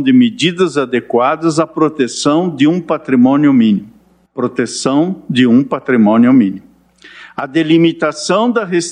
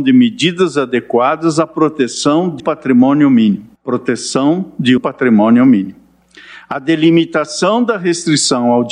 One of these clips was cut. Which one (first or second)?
second